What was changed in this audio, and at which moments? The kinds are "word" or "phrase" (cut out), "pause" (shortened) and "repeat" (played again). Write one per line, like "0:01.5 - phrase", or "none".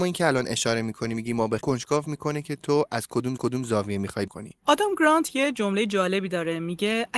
0:01.6 - phrase
0:03.4 - repeat
0:04.3 - phrase